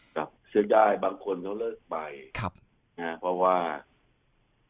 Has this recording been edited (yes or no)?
no